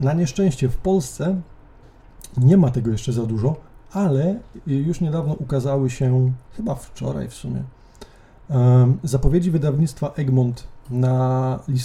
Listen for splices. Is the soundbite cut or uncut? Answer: cut